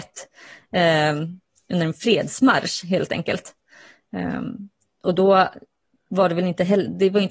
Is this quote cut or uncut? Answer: uncut